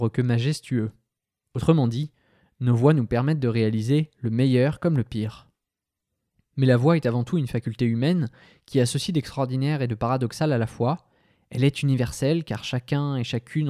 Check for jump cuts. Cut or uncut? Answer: uncut